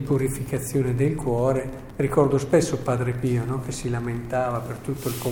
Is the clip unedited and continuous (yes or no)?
yes